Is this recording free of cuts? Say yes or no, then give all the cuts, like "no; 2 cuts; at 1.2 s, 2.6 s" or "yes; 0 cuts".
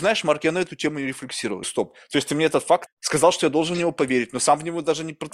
no; 2 cuts; at 1.6 s, 2.9 s